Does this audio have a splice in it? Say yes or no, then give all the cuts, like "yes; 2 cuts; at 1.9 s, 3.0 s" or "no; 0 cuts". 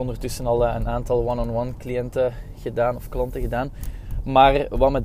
no; 0 cuts